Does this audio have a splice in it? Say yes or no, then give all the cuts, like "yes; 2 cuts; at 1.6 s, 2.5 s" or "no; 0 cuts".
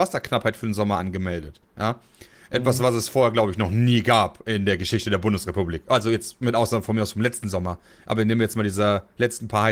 no; 0 cuts